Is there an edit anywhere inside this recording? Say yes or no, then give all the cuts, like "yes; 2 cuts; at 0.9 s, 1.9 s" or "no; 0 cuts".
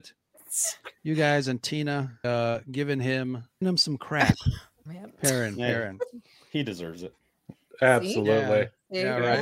yes; 4 cuts; at 1.0 s, 2.2 s, 3.6 s, 4.9 s